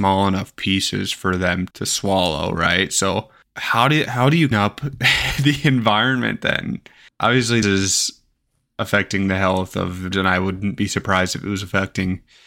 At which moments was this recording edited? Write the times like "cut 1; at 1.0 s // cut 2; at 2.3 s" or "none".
cut 1; at 1.7 s // cut 2; at 4.5 s // cut 3; at 7.6 s // cut 4; at 10.1 s